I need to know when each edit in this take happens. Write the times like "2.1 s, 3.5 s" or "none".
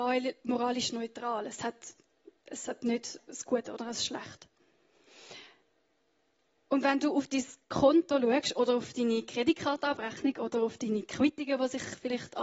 none